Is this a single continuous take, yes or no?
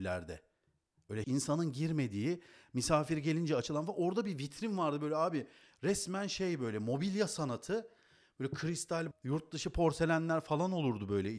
no